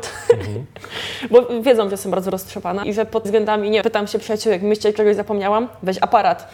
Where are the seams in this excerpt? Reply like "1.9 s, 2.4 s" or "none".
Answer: 2.8 s, 3.2 s, 3.8 s